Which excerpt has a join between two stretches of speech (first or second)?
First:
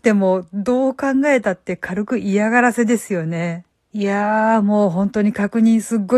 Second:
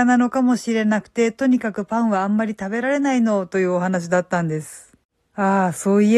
first